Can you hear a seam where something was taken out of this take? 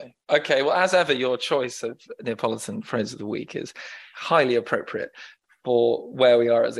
no; 0 cuts

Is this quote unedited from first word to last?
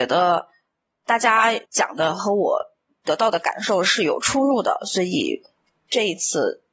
no; 1 cut; at 1.7 s

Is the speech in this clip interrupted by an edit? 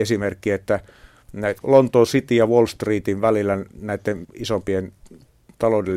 yes; 2 cuts; at 1.6 s, 4.2 s

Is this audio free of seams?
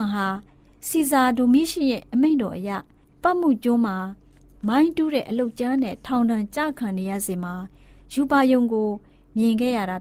yes; 0 cuts

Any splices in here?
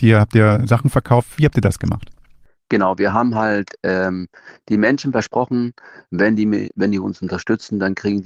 no; 0 cuts

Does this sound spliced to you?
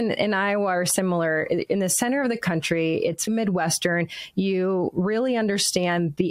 yes; 1 cut; at 3.3 s

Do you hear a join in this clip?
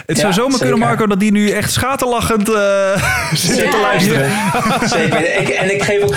no; 0 cuts

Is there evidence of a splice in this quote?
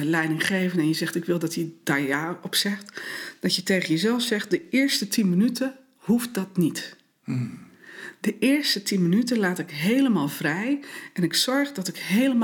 no; 0 cuts

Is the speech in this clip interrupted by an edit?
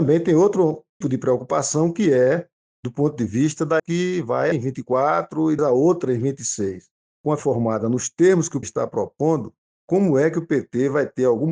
yes; 6 cuts; at 1.0 s, 3.8 s, 4.5 s, 5.6 s, 7.4 s, 8.6 s

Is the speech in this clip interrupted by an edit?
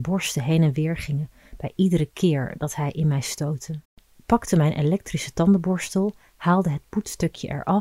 yes; 1 cut; at 3.8 s

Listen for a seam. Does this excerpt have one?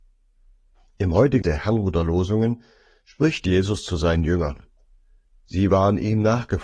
yes; 1 cut; at 1.4 s

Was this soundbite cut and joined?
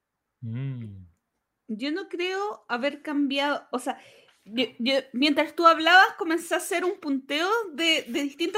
no; 0 cuts

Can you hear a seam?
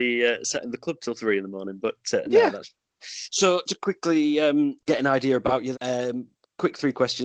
yes; 3 cuts; at 3.7 s, 4.8 s, 5.7 s

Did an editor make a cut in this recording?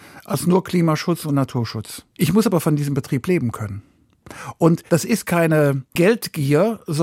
yes; 2 cuts; at 2.1 s, 4.9 s

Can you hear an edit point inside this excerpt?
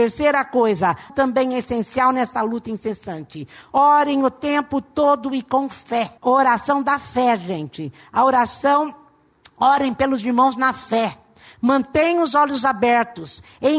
yes; 2 cuts; at 1.1 s, 6.2 s

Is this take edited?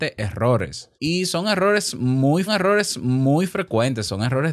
yes; 2 cuts; at 0.9 s, 2.5 s

